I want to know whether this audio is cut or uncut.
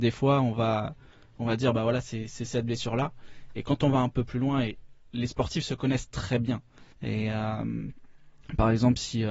cut